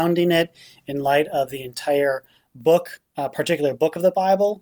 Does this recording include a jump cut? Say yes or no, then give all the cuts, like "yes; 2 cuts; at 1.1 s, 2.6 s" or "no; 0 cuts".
no; 0 cuts